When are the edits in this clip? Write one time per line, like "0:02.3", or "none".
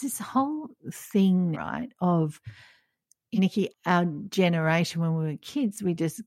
0:01.5
0:03.4
0:03.7